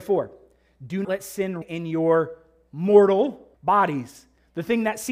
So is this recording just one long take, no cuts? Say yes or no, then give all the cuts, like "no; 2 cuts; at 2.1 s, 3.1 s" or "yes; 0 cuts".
no; 3 cuts; at 1.0 s, 1.6 s, 3.5 s